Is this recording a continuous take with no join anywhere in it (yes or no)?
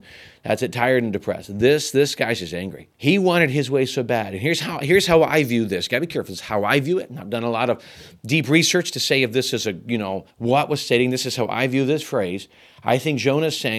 no